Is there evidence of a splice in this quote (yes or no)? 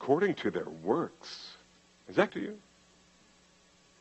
yes